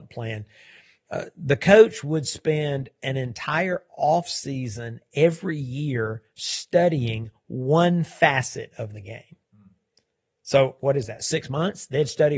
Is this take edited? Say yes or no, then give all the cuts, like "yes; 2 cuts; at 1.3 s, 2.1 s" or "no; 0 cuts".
no; 0 cuts